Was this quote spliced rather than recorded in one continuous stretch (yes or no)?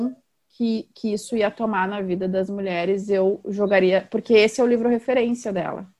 no